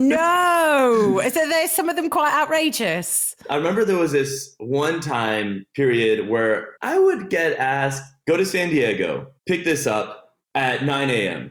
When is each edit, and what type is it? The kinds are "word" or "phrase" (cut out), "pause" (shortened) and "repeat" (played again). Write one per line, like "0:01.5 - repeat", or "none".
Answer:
0:06.8 - pause
0:09.4 - pause